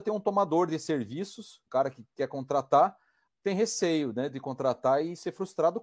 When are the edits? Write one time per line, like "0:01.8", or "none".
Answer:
0:01.7
0:03.3